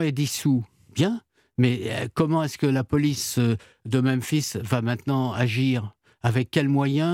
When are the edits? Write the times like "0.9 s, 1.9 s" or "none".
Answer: none